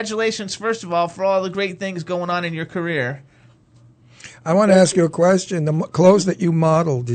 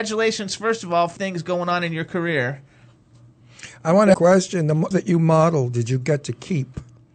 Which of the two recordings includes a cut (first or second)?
second